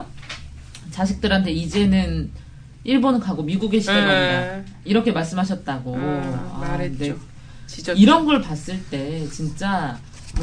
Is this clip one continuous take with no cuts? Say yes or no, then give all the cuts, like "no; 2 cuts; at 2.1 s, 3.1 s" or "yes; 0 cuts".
yes; 0 cuts